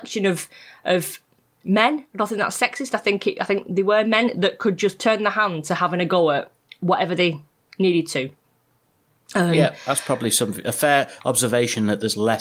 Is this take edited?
no; 0 cuts

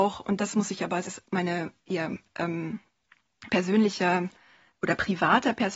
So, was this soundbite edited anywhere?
yes; 2 cuts; at 1.1 s, 3.5 s

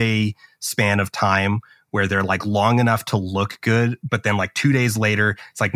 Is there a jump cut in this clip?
no; 0 cuts

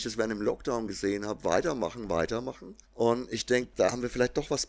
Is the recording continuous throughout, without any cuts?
no; 1 cut; at 2.8 s

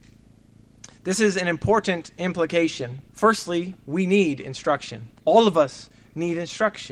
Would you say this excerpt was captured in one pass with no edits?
no; 2 cuts; at 3.1 s, 5.2 s

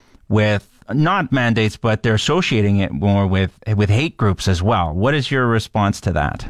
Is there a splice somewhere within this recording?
yes; 1 cut; at 1.3 s

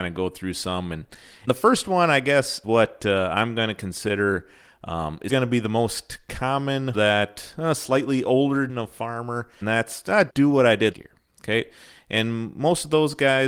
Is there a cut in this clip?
yes; 8 cuts; at 1.5 s, 2.6 s, 5.3 s, 6.9 s, 8.7 s, 9.6 s, 10.3 s, 10.9 s

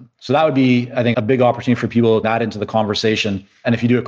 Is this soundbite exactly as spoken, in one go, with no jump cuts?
no; 2 cuts; at 1.1 s, 2.2 s

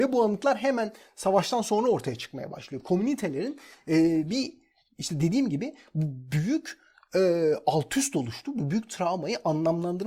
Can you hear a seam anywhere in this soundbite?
no; 0 cuts

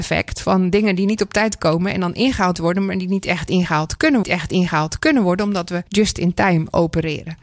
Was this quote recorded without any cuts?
no; 3 cuts; at 2.6 s, 4.2 s, 5.9 s

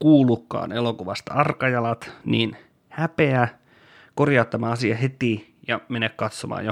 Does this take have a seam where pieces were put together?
no; 0 cuts

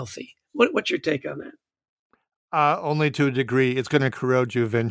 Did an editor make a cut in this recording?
no; 0 cuts

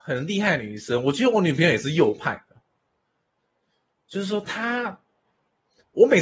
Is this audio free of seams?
yes; 0 cuts

